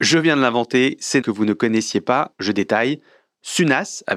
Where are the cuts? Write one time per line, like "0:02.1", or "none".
0:01.2
0:02.3